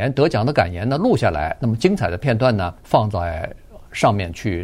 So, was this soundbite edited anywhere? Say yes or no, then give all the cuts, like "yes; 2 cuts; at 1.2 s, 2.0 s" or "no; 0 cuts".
yes; 1 cut; at 2.8 s